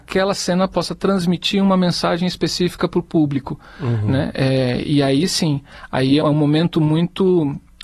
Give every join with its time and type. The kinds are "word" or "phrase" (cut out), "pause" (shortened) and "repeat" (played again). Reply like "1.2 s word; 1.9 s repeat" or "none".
6.2 s word